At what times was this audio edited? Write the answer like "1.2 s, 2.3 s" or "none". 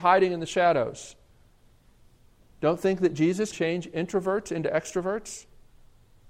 3.5 s